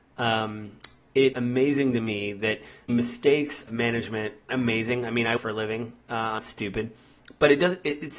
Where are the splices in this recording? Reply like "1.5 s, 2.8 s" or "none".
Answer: 1.3 s, 2.9 s, 3.7 s, 4.5 s, 5.4 s, 6.4 s